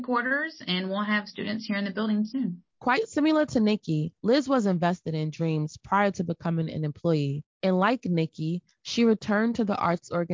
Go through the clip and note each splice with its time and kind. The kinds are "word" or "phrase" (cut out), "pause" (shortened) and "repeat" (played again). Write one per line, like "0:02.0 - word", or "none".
0:02.7 - pause
0:04.2 - pause